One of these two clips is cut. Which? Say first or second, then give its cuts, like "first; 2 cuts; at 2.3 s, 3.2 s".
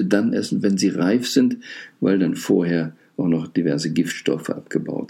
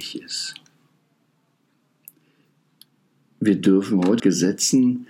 second; 1 cut; at 4.2 s